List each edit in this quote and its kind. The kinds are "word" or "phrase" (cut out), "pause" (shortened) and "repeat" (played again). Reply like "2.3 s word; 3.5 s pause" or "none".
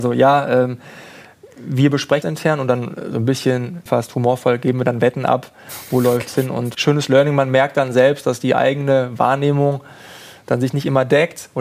2.2 s word; 3.9 s word; 6.7 s word